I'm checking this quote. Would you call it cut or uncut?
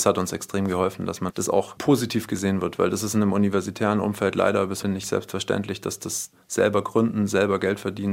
cut